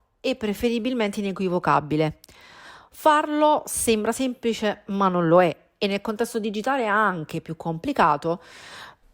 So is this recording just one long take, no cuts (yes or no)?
yes